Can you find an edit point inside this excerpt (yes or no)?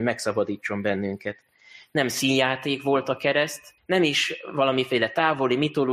yes